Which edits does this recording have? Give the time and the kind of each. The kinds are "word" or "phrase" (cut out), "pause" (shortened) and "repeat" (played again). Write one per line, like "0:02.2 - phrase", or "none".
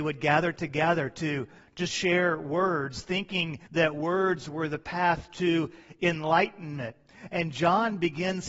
0:01.9 - phrase
0:03.7 - pause